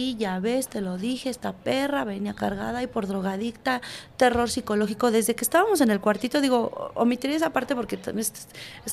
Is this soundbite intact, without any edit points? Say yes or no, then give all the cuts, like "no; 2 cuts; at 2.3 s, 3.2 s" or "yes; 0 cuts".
yes; 0 cuts